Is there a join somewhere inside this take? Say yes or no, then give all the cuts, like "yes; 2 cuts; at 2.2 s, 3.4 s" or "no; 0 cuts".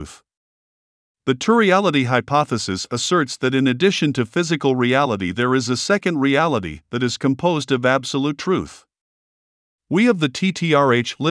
no; 0 cuts